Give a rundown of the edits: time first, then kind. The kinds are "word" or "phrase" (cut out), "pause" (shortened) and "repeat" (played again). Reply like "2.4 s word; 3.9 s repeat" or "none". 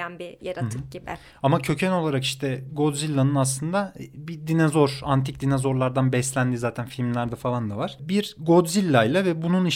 none